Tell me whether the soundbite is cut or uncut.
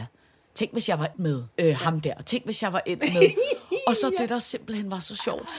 cut